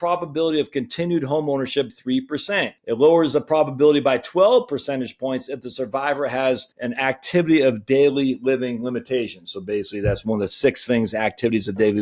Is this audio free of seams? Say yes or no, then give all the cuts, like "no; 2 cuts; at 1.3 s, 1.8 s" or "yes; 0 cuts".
no; 3 cuts; at 1.9 s, 2.8 s, 6.7 s